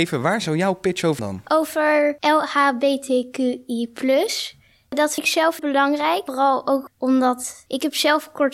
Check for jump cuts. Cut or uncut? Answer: cut